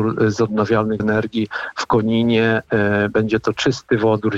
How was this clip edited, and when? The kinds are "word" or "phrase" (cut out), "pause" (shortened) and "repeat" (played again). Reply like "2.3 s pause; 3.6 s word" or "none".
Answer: 1.0 s word